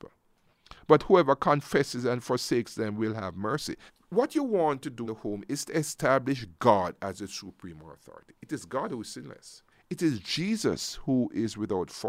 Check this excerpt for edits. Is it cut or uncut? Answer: cut